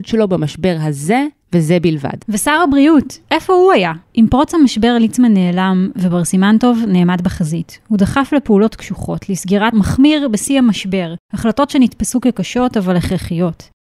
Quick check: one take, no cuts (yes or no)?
no